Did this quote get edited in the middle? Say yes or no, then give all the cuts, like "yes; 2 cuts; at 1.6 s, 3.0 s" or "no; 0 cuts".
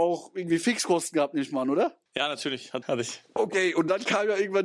yes; 3 cuts; at 2.1 s, 2.8 s, 3.3 s